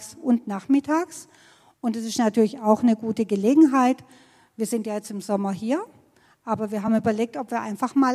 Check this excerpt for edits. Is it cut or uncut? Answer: uncut